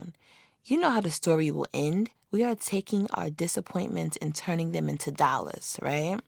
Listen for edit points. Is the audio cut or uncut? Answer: cut